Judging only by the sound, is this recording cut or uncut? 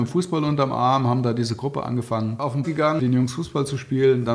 cut